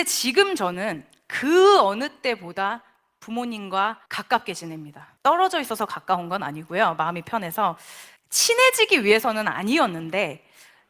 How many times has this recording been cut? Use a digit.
3